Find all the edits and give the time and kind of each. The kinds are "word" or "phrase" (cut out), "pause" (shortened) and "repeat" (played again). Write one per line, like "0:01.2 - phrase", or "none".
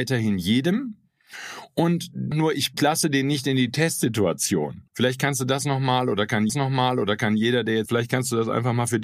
0:02.3 - word
0:02.8 - word
0:04.9 - pause
0:06.5 - repeat
0:07.9 - word